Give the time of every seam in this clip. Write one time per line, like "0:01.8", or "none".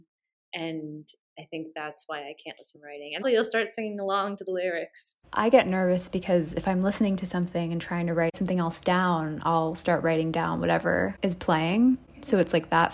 0:02.7
0:03.2